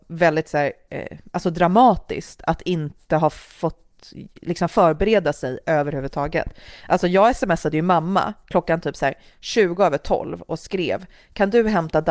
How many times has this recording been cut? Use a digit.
0